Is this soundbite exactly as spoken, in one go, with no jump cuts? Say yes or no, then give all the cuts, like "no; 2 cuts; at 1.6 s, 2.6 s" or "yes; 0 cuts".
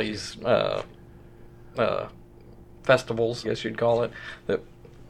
no; 1 cut; at 3.4 s